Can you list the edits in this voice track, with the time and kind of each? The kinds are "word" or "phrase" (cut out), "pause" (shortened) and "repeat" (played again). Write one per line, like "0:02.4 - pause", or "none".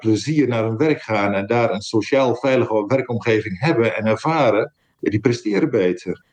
none